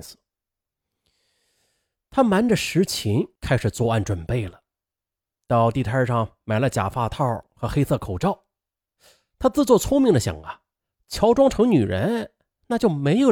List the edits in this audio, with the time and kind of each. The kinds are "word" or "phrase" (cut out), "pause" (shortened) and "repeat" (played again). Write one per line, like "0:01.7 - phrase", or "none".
0:03.3 - pause